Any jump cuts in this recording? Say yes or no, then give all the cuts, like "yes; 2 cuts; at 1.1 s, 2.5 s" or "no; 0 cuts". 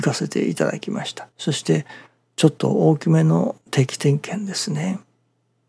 yes; 2 cuts; at 1.3 s, 3.6 s